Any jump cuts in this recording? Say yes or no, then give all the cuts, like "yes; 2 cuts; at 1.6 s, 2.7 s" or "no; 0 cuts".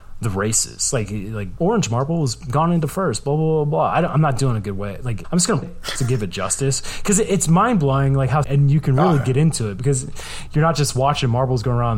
yes; 5 cuts; at 1.6 s, 5.2 s, 5.6 s, 6.0 s, 8.4 s